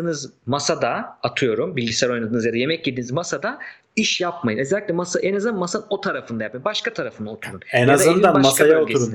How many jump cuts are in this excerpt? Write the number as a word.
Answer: zero